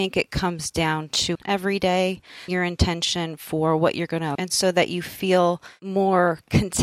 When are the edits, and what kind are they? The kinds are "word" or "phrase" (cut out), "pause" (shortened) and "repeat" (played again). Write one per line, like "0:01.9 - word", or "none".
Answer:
0:01.3 - word
0:02.5 - word
0:04.4 - word